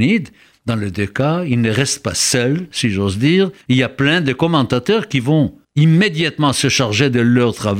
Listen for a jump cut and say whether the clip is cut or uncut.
cut